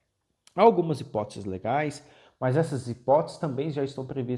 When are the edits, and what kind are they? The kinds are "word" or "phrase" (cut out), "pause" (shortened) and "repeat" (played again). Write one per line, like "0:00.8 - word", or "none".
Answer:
none